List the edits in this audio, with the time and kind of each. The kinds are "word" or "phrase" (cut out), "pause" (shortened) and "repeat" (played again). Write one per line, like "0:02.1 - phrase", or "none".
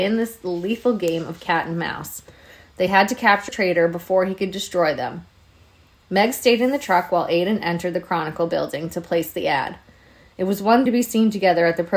0:03.5 - word
0:10.9 - word